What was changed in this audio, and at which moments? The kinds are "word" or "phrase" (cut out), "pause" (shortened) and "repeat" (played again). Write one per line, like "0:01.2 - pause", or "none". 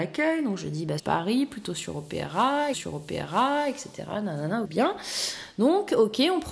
0:01.0 - word
0:02.7 - repeat
0:04.6 - phrase

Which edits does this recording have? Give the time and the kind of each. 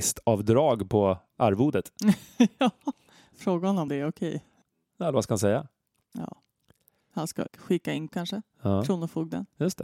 0:03.9 - word
0:07.5 - word
0:08.1 - word

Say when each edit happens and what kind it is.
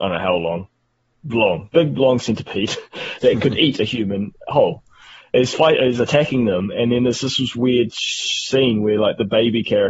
0:01.7 - word

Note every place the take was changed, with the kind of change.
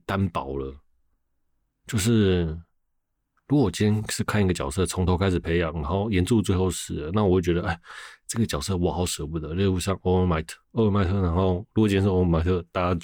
0:10.6 - pause

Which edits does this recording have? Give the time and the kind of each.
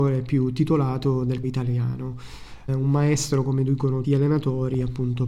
0:01.4 - word
0:02.7 - word
0:04.0 - word

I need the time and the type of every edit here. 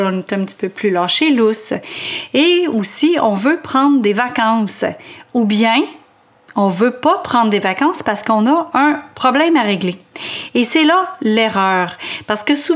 none

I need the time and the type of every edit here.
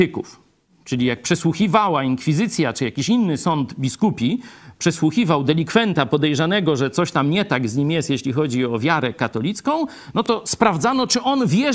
none

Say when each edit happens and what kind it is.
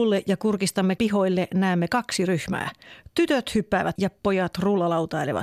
0:01.0 - word
0:04.0 - word

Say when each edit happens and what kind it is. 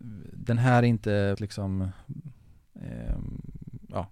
0:01.3 - word

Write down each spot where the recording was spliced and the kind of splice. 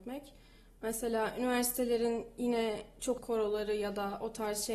0:03.2 - word

